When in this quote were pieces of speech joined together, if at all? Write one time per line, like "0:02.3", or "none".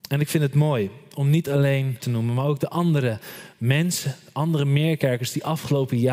0:02.0